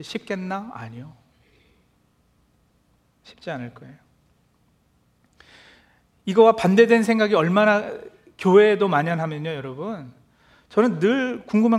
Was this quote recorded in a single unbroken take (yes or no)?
yes